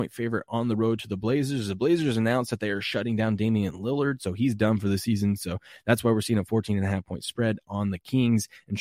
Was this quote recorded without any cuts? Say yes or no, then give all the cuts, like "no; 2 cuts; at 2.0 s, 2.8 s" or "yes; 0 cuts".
yes; 0 cuts